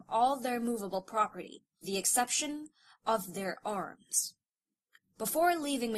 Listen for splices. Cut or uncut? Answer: cut